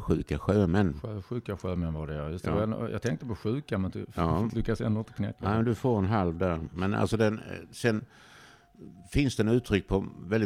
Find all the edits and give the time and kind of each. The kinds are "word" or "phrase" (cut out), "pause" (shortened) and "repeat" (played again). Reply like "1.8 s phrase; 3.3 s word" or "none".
none